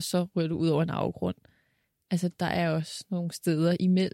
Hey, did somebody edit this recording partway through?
no; 0 cuts

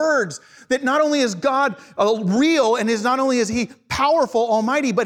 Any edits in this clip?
no; 0 cuts

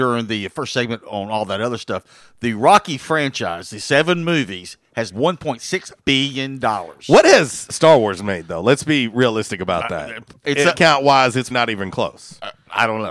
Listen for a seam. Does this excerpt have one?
yes; 5 cuts; at 5.1 s, 6.0 s, 10.4 s, 10.7 s, 11.5 s

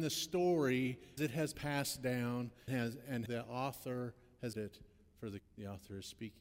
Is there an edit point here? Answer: yes; 6 cuts; at 1.2 s, 1.5 s, 2.7 s, 3.3 s, 4.5 s, 5.4 s

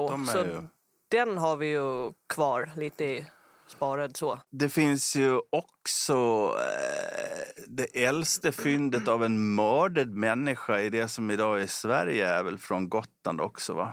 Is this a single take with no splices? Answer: yes; 0 cuts

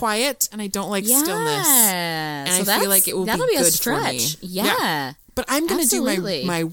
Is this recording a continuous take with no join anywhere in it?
yes; 0 cuts

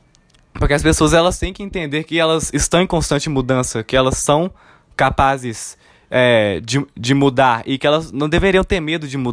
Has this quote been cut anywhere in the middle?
no; 0 cuts

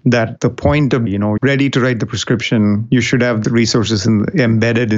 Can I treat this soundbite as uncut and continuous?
no; 3 cuts; at 1.1 s, 1.4 s, 3.4 s

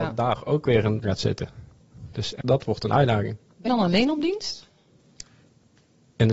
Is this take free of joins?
no; 3 cuts; at 1.0 s, 2.4 s, 3.7 s

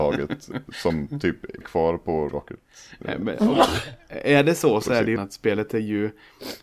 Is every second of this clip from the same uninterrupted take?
no; 3 cuts; at 1.6 s, 2.3 s, 5.2 s

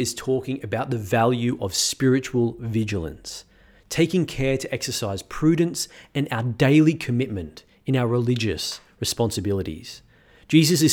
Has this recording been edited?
no; 0 cuts

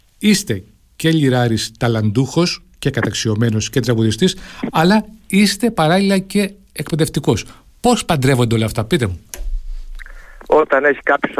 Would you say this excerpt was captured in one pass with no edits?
yes; 0 cuts

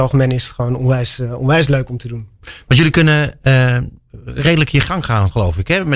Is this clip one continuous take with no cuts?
yes; 0 cuts

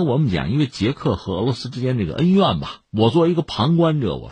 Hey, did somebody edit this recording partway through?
yes; 1 cut; at 2.8 s

